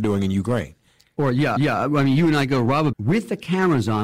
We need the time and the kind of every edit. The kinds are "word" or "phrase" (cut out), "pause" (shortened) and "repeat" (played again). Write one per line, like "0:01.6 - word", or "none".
0:01.6 - repeat
0:02.9 - word